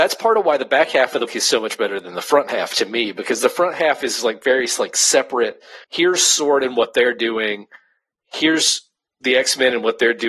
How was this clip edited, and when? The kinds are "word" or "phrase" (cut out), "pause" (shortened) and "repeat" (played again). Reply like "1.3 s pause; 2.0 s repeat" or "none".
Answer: 1.3 s word; 5.8 s pause